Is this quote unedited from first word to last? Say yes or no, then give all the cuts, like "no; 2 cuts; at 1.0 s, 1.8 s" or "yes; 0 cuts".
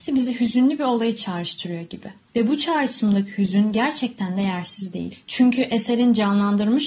yes; 0 cuts